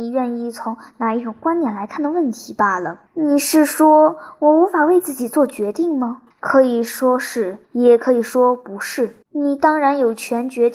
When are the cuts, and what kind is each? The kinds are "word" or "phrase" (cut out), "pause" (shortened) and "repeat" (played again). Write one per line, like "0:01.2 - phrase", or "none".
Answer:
0:03.1 - pause
0:06.3 - pause
0:07.6 - pause
0:09.2 - pause

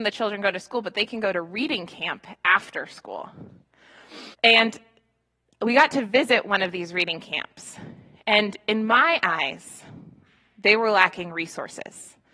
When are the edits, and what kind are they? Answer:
0:04.3 - pause

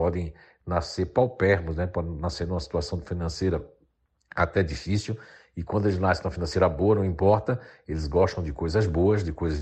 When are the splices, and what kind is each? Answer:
none

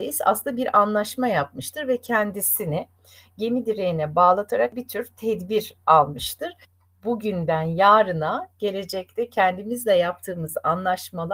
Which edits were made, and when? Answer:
none

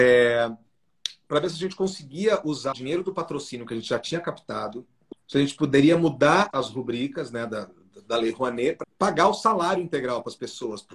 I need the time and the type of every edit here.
0:02.7 - word
0:05.2 - pause
0:06.5 - word
0:08.8 - phrase

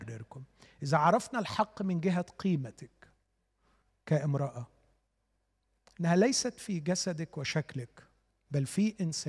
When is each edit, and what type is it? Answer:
none

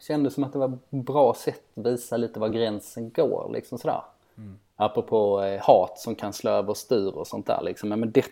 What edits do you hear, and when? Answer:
none

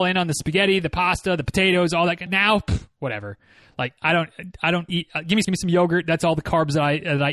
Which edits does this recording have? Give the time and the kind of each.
0:02.3 - word
0:04.0 - pause
0:04.9 - word
0:05.4 - phrase

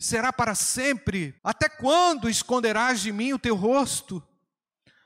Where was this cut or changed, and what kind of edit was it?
0:01.4 - pause

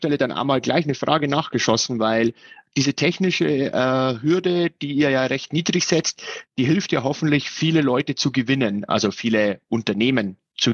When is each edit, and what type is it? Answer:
none

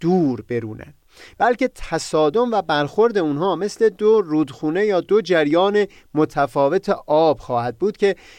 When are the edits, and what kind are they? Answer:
none

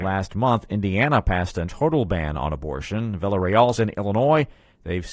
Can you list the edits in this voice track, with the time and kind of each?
0:01.7 - word
0:03.8 - word

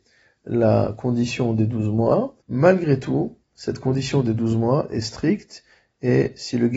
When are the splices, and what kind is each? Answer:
0:02.4 - pause
0:03.4 - pause

